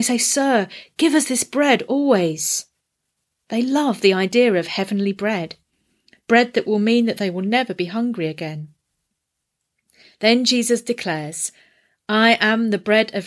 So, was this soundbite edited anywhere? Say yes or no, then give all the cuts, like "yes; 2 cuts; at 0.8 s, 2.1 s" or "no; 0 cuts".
no; 0 cuts